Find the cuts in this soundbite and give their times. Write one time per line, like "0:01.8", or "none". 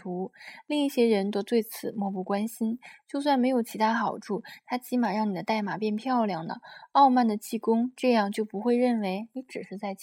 none